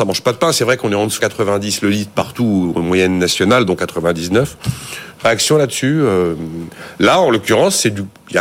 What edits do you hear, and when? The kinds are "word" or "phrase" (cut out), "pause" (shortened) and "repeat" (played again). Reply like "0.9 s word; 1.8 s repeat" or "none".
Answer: 1.2 s word; 3.8 s phrase